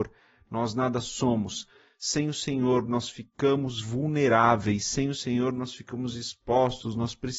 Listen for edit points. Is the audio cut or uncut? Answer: uncut